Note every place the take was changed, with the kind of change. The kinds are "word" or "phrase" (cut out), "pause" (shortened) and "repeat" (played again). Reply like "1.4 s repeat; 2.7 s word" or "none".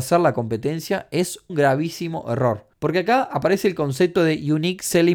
1.5 s word; 2.7 s pause

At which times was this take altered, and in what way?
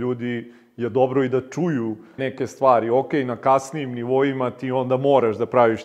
2.2 s word

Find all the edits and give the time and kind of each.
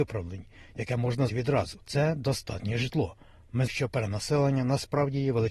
1.3 s word; 1.8 s pause; 3.7 s word

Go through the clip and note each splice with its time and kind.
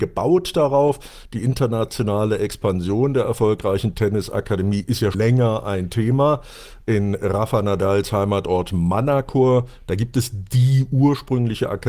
5.1 s word

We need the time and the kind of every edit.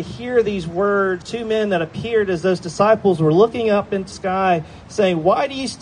1.2 s word; 4.1 s word

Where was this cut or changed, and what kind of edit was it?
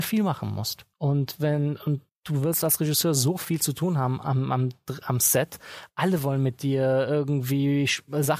0.9 s pause; 2.1 s pause

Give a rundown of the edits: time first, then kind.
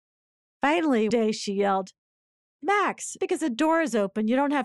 1.1 s word; 3.2 s word

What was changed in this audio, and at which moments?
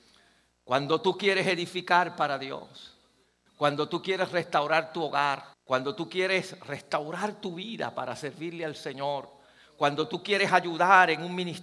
5.5 s pause

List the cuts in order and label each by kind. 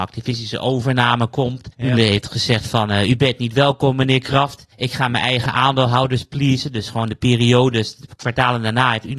1.7 s pause; 4.7 s pause

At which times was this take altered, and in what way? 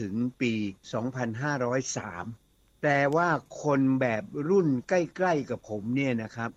none

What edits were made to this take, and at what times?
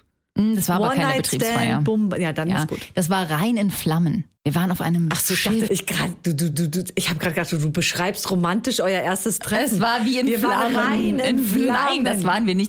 4.4 s pause; 5.7 s word; 6.5 s repeat

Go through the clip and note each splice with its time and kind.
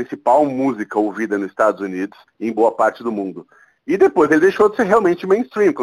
2.3 s pause

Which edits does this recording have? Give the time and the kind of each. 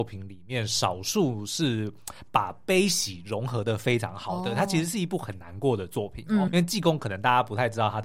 6.5 s word

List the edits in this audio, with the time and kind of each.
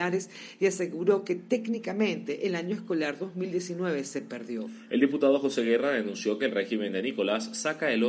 none

